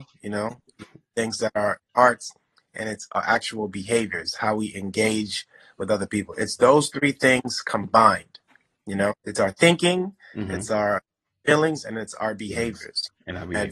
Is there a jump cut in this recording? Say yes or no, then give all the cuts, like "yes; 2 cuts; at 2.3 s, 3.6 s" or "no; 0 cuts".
yes; 2 cuts; at 1.9 s, 9.2 s